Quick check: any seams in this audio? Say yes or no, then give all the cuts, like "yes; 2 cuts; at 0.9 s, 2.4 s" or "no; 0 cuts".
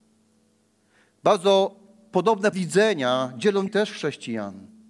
yes; 2 cuts; at 2.5 s, 3.7 s